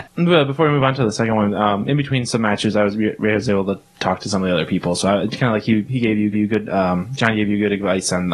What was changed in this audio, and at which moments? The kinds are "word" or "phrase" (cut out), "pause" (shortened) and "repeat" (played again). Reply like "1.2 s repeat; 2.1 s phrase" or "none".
6.3 s repeat